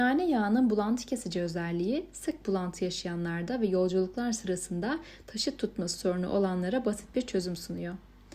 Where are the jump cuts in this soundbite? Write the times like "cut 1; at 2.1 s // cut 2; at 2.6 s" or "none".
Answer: none